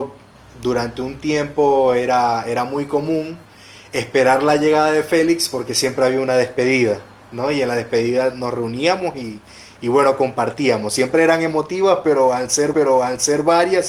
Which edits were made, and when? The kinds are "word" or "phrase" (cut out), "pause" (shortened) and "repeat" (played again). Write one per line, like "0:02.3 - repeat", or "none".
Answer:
0:12.7 - repeat